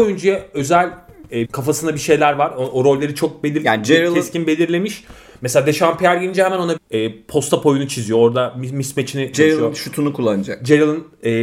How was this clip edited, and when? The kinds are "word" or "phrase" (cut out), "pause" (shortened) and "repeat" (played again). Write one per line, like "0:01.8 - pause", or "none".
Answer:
0:01.4 - word
0:06.8 - word
0:09.3 - word